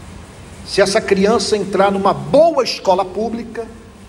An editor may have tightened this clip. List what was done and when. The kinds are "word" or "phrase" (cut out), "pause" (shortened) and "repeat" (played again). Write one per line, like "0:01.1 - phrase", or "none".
none